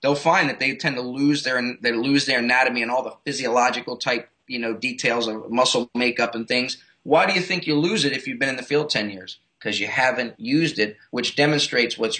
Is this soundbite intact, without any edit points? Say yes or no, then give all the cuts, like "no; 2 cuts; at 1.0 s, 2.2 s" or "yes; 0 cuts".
yes; 0 cuts